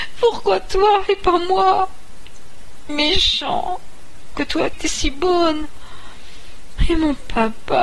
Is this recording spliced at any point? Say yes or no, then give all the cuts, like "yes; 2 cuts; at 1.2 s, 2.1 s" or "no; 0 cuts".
yes; 3 cuts; at 2.9 s, 4.3 s, 4.7 s